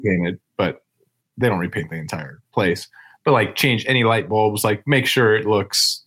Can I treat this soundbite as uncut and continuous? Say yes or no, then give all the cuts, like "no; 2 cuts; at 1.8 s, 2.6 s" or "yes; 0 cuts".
yes; 0 cuts